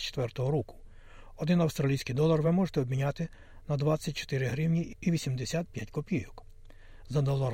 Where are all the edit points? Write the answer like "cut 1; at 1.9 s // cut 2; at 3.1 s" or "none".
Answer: none

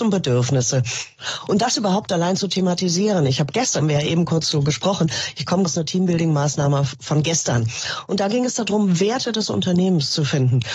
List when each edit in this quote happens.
cut 1; at 3.8 s // cut 2; at 5.6 s

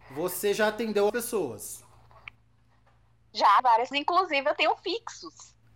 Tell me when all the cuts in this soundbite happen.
cut 1; at 1.1 s // cut 2; at 3.6 s // cut 3; at 3.9 s

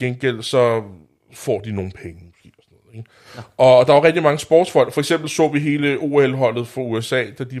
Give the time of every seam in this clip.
none

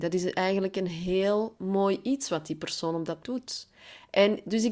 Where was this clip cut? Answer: cut 1; at 3.2 s

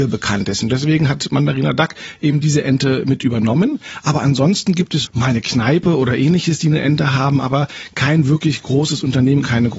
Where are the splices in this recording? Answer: cut 1; at 5.0 s

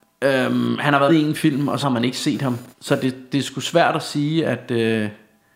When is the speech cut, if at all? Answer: cut 1; at 1.1 s // cut 2; at 1.8 s // cut 3; at 2.7 s

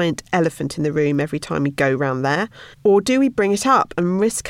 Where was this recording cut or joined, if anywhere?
cut 1; at 2.7 s

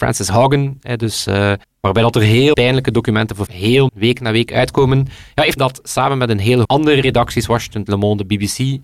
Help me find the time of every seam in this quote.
cut 1; at 1.6 s // cut 2; at 2.5 s // cut 3; at 3.5 s // cut 4; at 3.9 s // cut 5; at 5.6 s // cut 6; at 6.6 s // cut 7; at 7.9 s

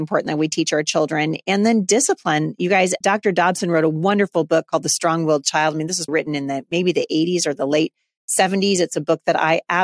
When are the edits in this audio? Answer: cut 1; at 3.0 s // cut 2; at 6.1 s

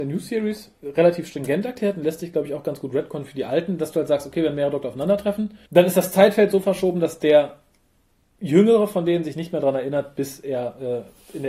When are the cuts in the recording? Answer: cut 1; at 5.7 s

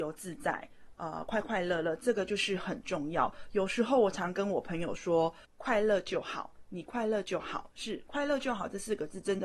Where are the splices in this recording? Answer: cut 1; at 5.4 s

